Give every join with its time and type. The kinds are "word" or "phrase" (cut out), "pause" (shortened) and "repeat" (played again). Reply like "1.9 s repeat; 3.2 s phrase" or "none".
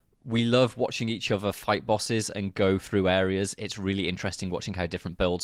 none